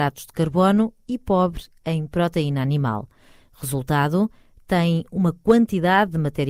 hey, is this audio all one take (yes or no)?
yes